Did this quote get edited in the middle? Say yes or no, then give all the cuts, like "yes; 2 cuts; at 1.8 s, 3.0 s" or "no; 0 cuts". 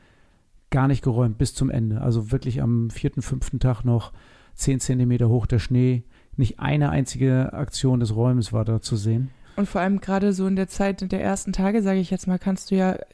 no; 0 cuts